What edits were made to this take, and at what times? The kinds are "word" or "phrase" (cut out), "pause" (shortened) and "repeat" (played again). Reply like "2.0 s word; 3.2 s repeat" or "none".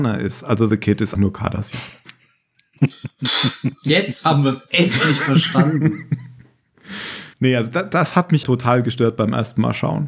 1.1 s word; 7.3 s pause; 8.4 s word

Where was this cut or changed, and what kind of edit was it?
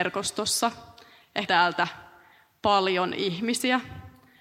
1.5 s phrase

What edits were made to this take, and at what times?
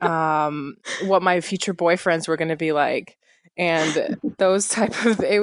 none

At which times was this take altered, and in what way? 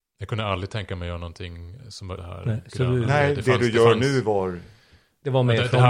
2.2 s word

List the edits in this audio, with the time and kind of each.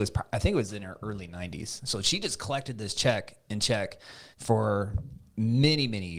4.3 s pause

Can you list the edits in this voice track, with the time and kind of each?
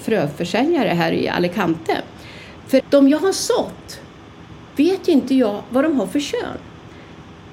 2.8 s word

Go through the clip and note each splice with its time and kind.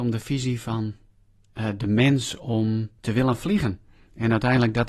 3.0 s pause

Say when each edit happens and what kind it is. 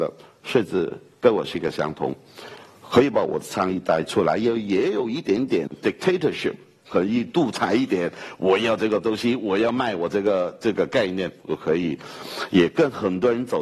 none

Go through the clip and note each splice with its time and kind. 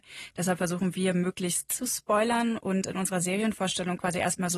1.7 s word

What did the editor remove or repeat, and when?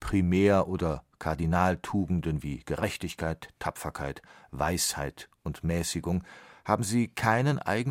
none

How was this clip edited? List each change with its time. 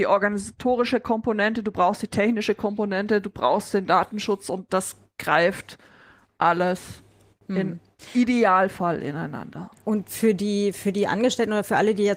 none

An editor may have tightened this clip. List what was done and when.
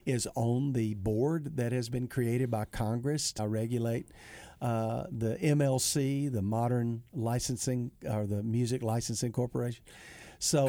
3.4 s word; 7.1 s word

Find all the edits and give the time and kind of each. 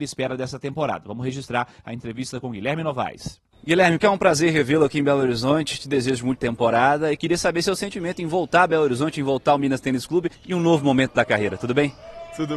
4.0 s word; 6.4 s phrase; 10.3 s pause

